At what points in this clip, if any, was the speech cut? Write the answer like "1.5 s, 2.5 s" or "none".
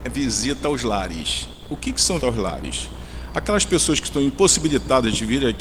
2.2 s